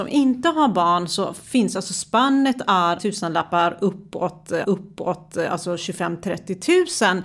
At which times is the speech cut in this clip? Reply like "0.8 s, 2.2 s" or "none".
3.0 s, 4.6 s